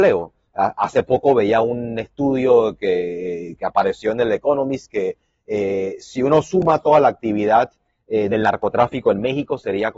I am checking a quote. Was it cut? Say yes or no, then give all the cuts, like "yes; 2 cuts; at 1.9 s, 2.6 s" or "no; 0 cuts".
no; 0 cuts